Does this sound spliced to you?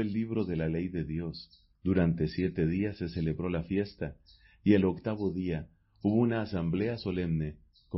yes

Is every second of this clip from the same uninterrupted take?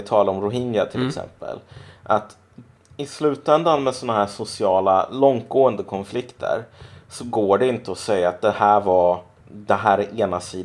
yes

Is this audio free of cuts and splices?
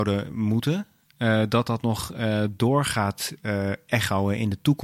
yes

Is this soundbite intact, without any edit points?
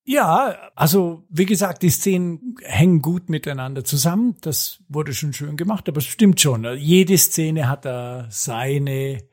yes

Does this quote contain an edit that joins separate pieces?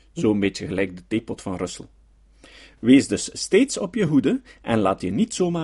no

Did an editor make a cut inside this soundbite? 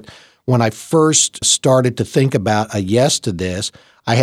yes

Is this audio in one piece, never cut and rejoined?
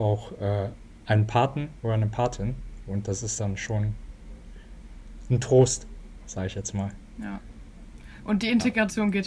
yes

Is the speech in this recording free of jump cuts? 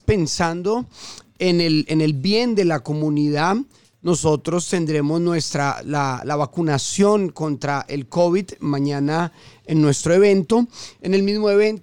yes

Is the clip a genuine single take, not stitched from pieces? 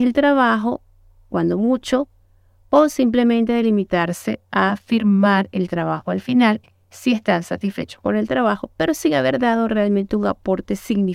yes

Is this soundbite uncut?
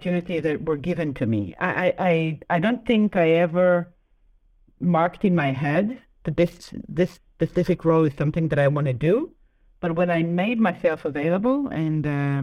yes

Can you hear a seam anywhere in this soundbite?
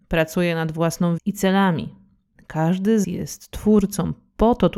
yes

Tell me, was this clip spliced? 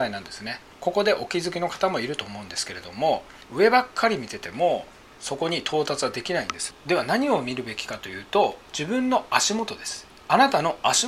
no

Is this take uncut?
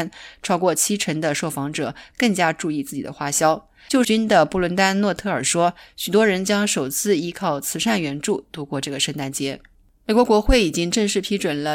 no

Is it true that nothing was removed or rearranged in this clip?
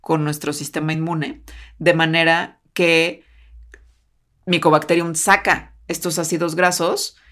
yes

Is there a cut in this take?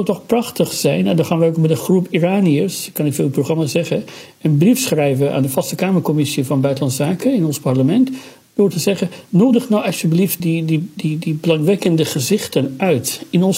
yes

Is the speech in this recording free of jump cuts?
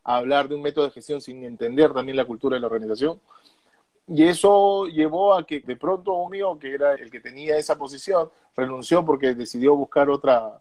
no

